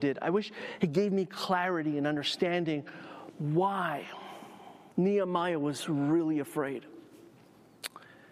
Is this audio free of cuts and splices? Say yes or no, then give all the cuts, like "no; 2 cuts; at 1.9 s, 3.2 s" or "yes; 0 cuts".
no; 1 cut; at 4.9 s